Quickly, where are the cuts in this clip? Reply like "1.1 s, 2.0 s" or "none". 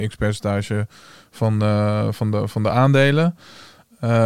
none